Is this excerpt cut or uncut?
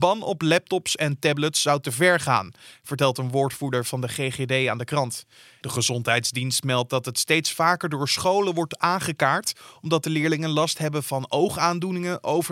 uncut